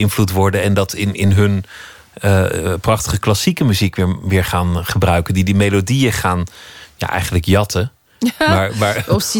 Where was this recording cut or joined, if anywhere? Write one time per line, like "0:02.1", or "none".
none